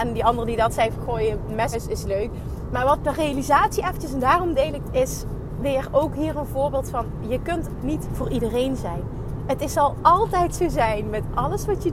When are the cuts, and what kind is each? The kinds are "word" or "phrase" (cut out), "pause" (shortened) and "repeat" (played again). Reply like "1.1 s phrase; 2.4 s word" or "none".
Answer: 1.7 s word; 3.0 s word; 4.8 s word; 7.8 s word

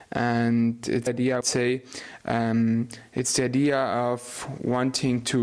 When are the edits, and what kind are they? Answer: 1.1 s phrase; 1.4 s word

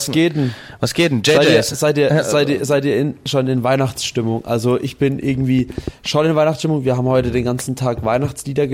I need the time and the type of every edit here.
none

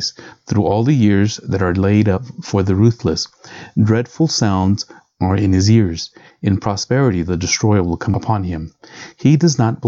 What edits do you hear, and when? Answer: none

